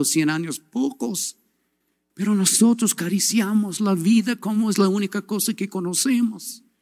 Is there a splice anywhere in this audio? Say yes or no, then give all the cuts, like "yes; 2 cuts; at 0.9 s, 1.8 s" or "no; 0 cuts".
no; 0 cuts